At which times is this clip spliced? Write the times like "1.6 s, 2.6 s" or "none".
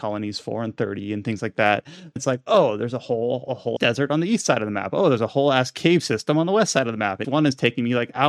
2.2 s, 3.8 s, 7.2 s

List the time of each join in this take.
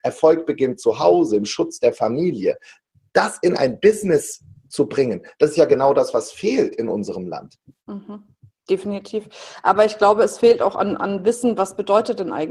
none

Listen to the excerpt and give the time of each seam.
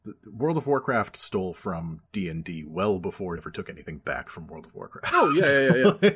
2.1 s, 3.4 s

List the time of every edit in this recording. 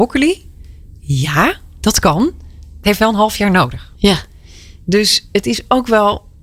2.8 s

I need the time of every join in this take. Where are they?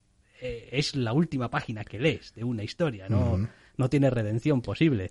none

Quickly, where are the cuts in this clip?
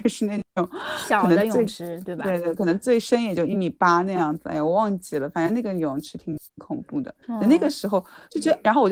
6.5 s, 7.2 s

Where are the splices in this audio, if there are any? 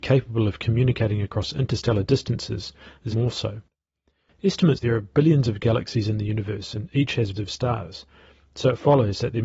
3.1 s, 4.8 s, 7.4 s

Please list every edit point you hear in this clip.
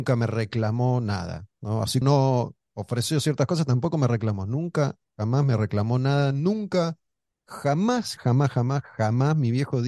1.5 s, 2.0 s, 8.2 s

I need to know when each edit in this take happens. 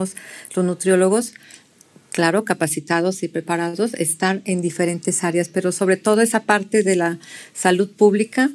none

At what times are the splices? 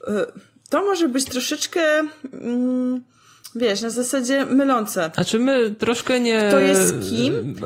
none

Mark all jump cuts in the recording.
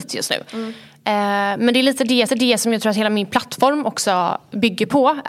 2.3 s

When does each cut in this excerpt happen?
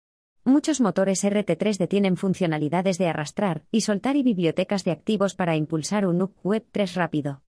3.7 s

